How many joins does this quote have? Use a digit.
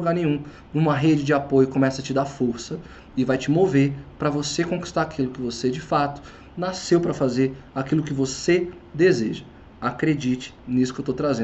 0